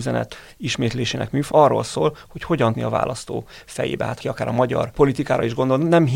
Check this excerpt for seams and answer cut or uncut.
cut